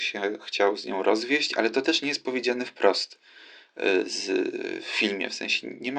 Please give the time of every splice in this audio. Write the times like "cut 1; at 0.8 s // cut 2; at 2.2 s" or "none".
none